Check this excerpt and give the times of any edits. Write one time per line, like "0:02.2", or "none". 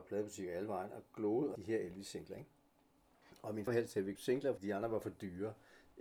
0:01.6
0:03.7
0:04.2
0:04.6